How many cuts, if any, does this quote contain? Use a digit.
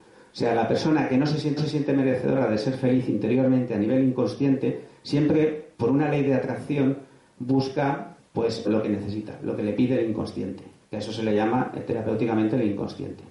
5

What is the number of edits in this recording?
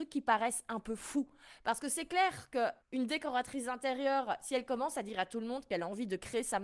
1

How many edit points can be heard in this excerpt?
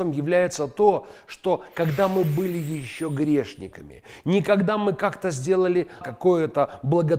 1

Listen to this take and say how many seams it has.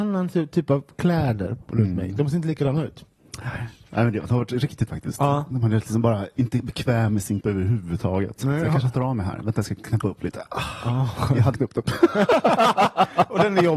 3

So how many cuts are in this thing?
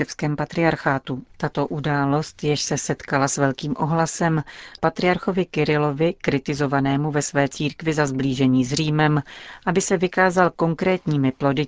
2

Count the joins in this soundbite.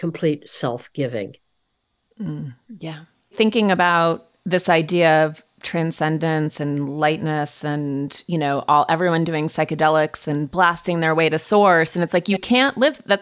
0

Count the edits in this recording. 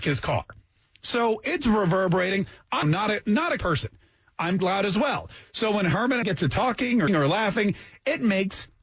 5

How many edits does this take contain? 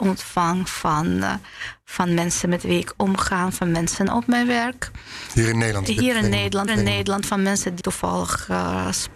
2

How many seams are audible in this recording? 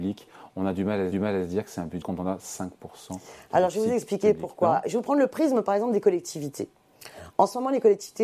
2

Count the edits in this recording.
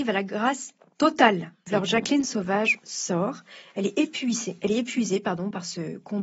0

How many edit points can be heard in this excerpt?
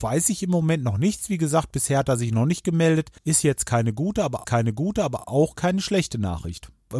2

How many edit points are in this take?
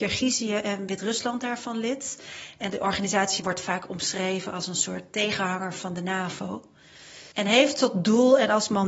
1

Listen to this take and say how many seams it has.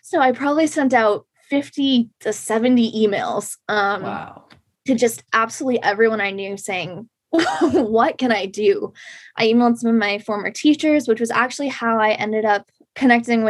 0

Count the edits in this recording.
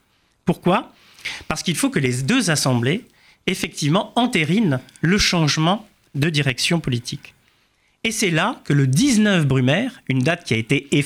0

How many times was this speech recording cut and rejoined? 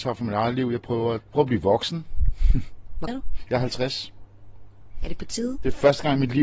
2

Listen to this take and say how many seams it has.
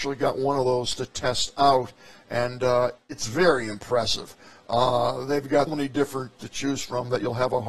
3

